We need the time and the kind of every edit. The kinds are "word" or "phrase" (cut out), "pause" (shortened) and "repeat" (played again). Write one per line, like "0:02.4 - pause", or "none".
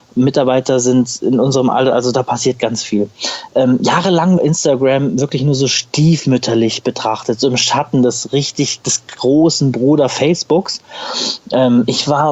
0:04.4 - phrase